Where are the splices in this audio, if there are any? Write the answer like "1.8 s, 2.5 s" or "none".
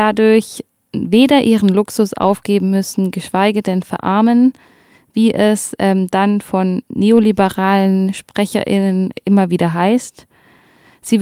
none